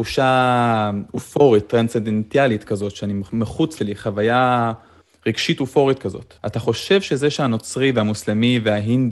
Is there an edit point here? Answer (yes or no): yes